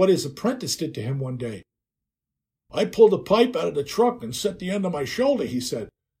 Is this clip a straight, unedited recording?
yes; 0 cuts

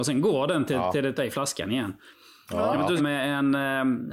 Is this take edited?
yes; 2 cuts; at 1.2 s, 3.0 s

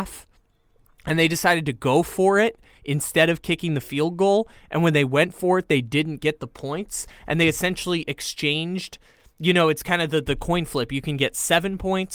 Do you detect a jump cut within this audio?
no; 0 cuts

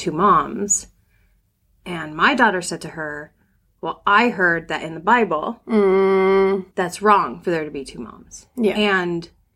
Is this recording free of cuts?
no; 1 cut; at 6.7 s

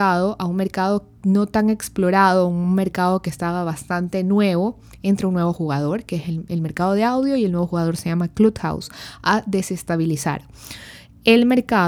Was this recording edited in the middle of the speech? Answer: no; 0 cuts

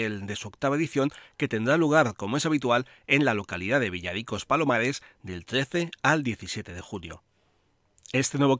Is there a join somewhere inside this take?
no; 0 cuts

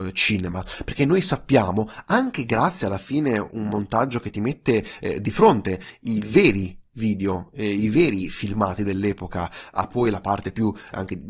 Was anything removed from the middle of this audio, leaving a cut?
no; 0 cuts

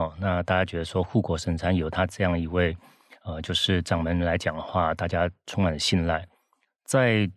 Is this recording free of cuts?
yes; 0 cuts

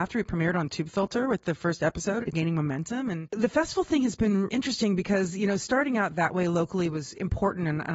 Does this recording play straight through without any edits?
no; 2 cuts; at 2.3 s, 4.5 s

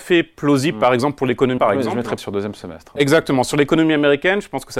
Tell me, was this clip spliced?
yes; 2 cuts; at 1.6 s, 2.2 s

